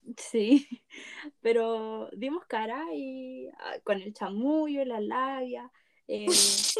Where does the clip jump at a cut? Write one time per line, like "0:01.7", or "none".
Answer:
none